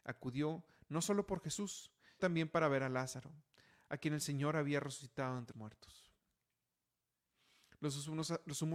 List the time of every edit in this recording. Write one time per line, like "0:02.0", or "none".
0:02.2
0:05.5